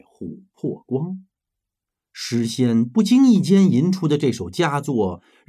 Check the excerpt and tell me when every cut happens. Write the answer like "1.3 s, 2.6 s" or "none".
none